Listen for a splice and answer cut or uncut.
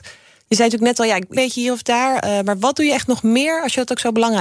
cut